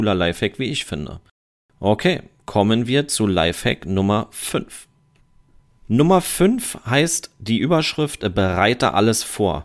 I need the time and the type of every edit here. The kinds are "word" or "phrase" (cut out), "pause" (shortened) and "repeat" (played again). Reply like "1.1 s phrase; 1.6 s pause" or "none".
none